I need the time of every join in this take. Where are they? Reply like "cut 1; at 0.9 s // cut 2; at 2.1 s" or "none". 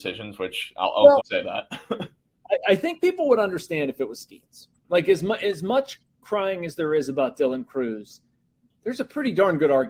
cut 1; at 1.2 s // cut 2; at 4.8 s